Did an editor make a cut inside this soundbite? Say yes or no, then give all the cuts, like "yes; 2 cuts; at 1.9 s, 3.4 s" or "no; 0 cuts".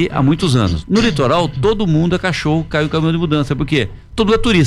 no; 0 cuts